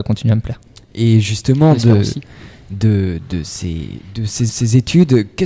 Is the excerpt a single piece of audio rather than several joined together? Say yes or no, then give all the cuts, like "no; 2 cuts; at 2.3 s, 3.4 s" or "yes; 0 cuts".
no; 1 cut; at 4.5 s